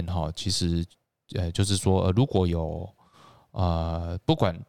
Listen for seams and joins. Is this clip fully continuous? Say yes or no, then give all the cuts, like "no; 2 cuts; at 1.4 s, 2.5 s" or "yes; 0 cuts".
yes; 0 cuts